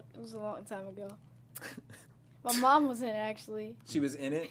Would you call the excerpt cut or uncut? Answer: uncut